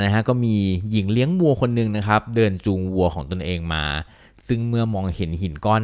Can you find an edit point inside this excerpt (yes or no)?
no